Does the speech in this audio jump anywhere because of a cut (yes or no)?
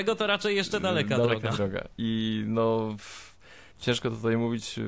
yes